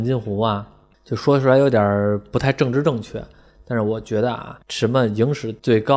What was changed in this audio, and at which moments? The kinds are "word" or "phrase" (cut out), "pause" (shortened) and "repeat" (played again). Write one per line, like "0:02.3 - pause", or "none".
0:04.6 - pause